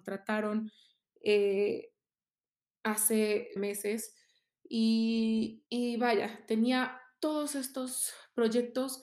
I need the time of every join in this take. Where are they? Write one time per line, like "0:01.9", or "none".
0:03.6
0:05.7